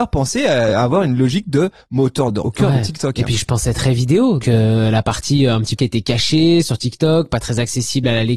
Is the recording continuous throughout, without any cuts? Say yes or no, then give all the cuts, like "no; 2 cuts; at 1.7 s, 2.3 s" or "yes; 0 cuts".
no; 3 cuts; at 2.4 s, 4.4 s, 5.8 s